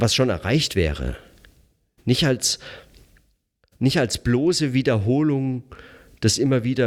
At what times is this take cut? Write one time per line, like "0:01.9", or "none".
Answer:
none